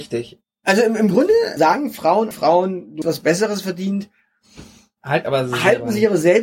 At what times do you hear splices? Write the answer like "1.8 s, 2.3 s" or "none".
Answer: 1.1 s, 1.6 s, 2.3 s, 3.0 s, 5.2 s

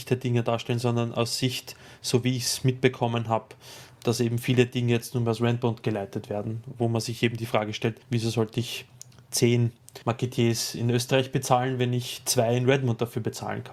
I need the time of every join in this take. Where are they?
8.0 s, 10.0 s

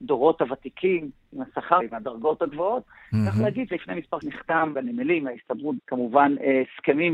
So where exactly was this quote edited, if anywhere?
1.8 s, 3.7 s, 4.2 s, 4.7 s, 5.8 s

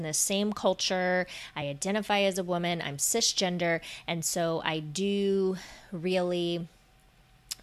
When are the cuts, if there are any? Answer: none

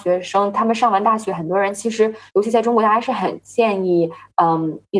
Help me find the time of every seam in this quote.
2.3 s

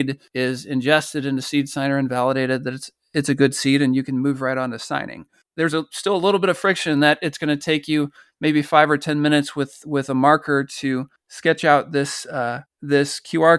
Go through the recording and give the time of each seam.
none

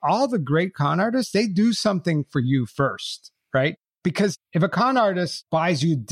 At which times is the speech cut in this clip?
none

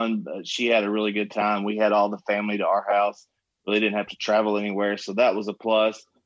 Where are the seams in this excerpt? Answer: none

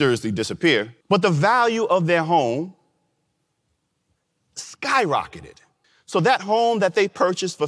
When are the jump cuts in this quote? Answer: 1.0 s, 5.8 s

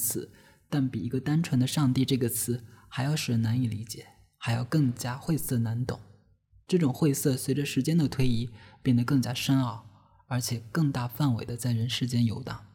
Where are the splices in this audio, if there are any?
none

